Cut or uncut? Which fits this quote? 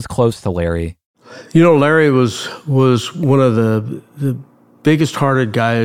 uncut